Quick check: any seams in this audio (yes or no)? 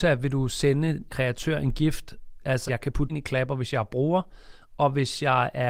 yes